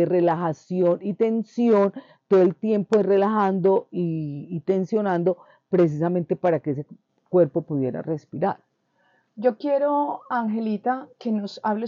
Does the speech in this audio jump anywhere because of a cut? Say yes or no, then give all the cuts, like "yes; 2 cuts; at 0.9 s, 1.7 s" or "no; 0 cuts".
no; 0 cuts